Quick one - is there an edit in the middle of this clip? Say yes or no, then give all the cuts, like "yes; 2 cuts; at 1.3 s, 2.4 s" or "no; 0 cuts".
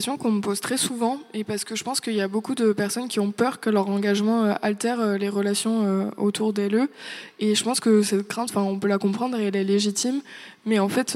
no; 0 cuts